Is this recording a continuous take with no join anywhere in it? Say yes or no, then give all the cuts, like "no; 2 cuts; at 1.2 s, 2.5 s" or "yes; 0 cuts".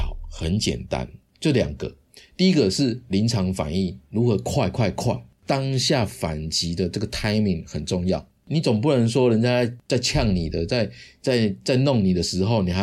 yes; 0 cuts